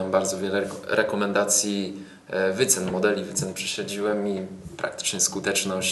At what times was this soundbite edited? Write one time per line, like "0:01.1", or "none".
none

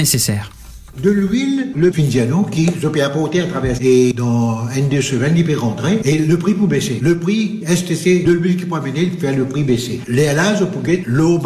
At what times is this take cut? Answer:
0:01.9
0:03.8
0:07.6

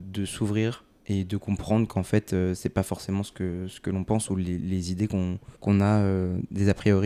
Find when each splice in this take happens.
0:05.5

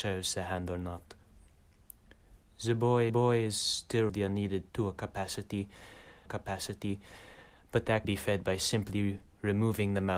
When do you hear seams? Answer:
0:02.4
0:03.1
0:04.1
0:04.7
0:06.3
0:08.0

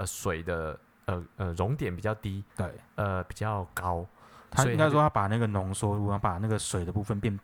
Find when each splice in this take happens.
0:02.5

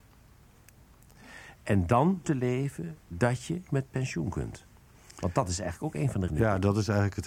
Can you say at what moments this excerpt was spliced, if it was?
0:01.6
0:02.2
0:03.7
0:06.3

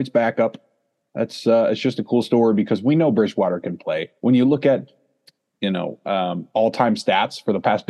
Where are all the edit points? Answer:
0:04.2

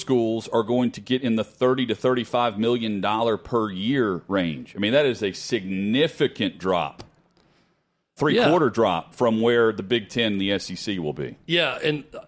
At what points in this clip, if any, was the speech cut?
none

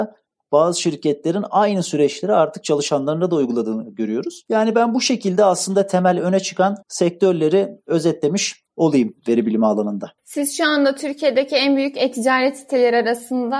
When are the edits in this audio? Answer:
0:06.8
0:08.7
0:10.2

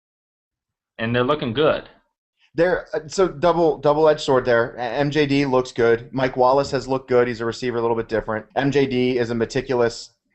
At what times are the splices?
0:08.5

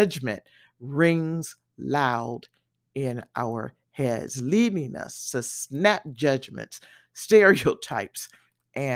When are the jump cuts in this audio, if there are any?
none

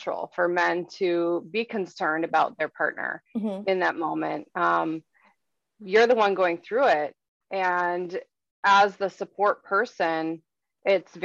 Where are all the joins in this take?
0:03.3

